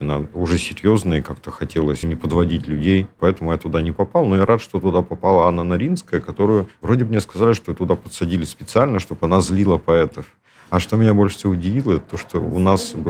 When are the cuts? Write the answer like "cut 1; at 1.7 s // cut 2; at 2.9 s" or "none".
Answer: cut 1; at 2.0 s